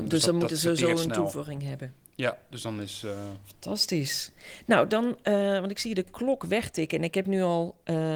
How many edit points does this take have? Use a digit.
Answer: 0